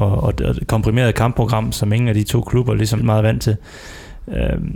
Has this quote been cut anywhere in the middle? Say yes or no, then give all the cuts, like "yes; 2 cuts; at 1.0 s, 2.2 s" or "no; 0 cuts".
yes; 2 cuts; at 1.7 s, 3.0 s